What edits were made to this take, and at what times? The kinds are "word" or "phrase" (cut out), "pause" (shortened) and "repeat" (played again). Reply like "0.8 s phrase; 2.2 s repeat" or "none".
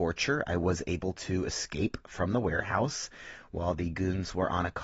none